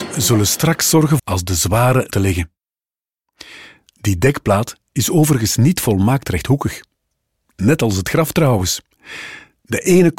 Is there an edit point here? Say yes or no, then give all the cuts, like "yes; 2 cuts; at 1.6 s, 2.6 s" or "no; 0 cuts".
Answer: yes; 2 cuts; at 1.2 s, 2.1 s